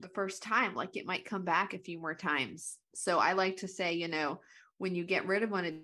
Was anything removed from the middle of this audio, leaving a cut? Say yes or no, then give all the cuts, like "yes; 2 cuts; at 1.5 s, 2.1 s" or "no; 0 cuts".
no; 0 cuts